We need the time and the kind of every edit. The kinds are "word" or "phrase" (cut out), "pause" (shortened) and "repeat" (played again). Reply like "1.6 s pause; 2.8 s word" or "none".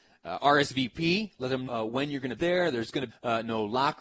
1.7 s word; 2.4 s word; 3.1 s phrase